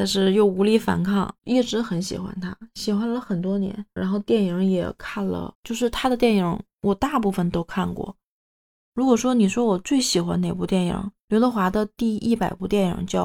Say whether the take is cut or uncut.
cut